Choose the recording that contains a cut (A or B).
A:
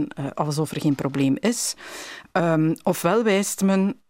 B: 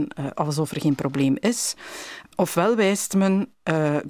B